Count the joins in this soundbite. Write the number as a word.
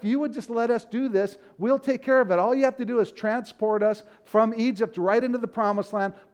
zero